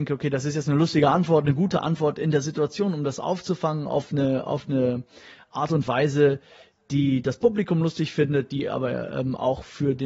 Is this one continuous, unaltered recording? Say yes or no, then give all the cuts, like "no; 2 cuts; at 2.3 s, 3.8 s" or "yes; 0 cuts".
yes; 0 cuts